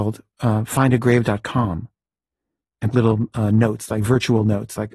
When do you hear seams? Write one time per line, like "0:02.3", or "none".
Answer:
0:02.9